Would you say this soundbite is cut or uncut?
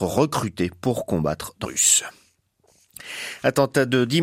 cut